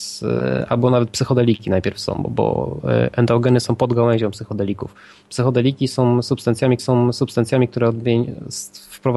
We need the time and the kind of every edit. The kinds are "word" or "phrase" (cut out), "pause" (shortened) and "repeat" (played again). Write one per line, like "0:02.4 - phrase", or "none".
0:02.2 - word
0:06.8 - repeat